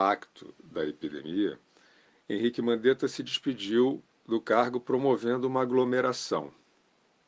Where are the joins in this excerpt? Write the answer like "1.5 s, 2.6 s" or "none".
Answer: none